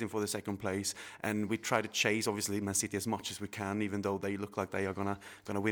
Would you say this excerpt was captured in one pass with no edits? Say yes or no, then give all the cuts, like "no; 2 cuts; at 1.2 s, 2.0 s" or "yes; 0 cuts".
yes; 0 cuts